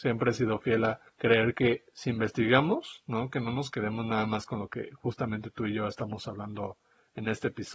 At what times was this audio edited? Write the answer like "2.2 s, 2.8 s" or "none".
1.1 s